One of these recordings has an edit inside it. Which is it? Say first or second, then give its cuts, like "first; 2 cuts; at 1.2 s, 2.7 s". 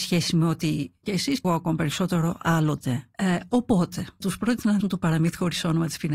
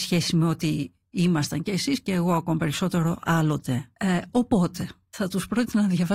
first; 4 cuts; at 1.0 s, 1.4 s, 4.2 s, 4.8 s